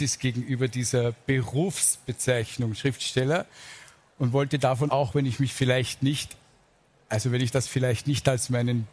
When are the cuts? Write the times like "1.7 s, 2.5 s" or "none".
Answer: 4.9 s